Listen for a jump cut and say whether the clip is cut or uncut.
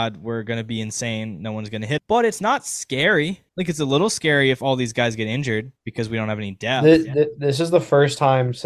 cut